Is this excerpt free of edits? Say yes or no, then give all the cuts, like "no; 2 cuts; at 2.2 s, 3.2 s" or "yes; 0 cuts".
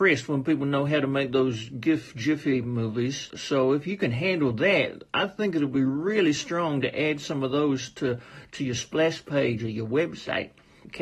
yes; 0 cuts